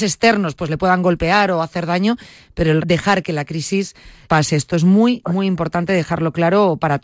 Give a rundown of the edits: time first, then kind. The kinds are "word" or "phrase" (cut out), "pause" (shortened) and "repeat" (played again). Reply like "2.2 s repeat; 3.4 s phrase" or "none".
2.8 s word; 4.2 s word